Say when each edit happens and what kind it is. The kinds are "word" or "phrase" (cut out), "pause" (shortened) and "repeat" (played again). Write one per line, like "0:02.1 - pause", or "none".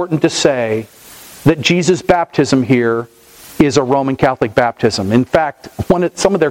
none